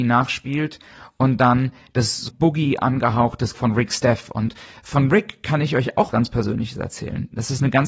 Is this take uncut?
no; 3 cuts; at 2.3 s, 3.5 s, 6.1 s

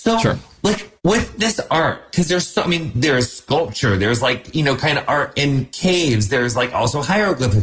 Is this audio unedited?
no; 1 cut; at 1.0 s

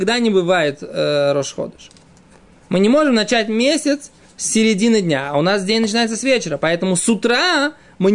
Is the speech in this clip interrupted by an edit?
no; 0 cuts

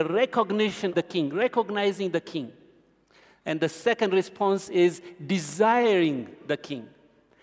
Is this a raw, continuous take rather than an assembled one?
no; 1 cut; at 0.9 s

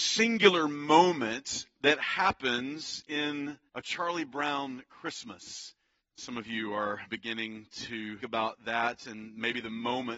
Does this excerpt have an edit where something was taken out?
yes; 4 cuts; at 3.7 s, 6.0 s, 7.1 s, 8.2 s

